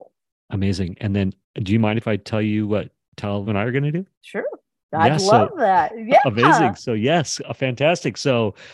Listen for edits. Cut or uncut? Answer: cut